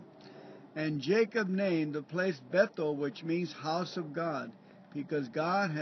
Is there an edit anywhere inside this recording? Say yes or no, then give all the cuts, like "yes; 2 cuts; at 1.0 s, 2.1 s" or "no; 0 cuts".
no; 0 cuts